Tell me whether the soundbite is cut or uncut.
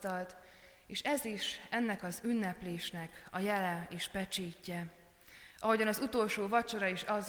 uncut